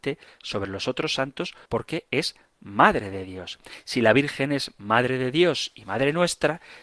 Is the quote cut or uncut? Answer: cut